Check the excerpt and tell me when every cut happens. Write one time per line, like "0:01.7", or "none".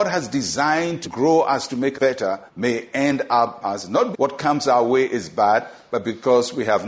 0:01.0
0:01.9
0:02.5
0:03.6
0:04.1